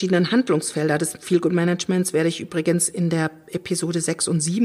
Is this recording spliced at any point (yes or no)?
no